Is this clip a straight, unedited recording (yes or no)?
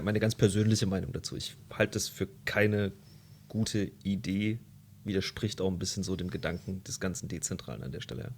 yes